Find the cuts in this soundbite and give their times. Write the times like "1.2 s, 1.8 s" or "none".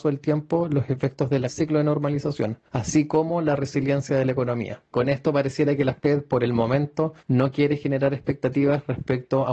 1.5 s, 2.7 s, 4.9 s, 7.2 s